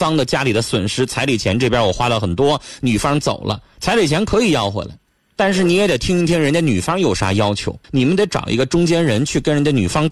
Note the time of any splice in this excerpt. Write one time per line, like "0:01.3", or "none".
0:05.1
0:07.8

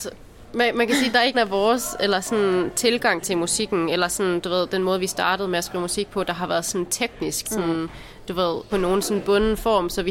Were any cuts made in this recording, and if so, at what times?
0:01.3
0:07.4
0:08.7

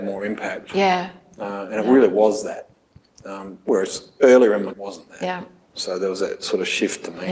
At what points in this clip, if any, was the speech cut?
0:04.7

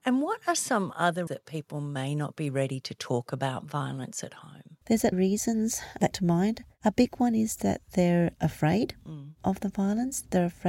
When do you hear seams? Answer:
0:01.3
0:04.8
0:05.1
0:06.1

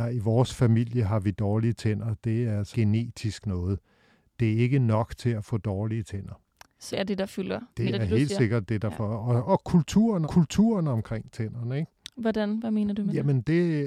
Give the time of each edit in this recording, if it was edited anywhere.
0:02.7
0:06.9
0:07.9
0:10.2

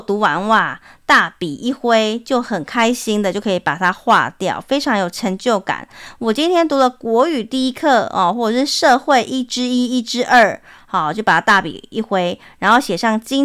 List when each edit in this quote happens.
none

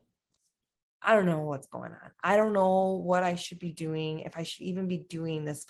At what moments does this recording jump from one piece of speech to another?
none

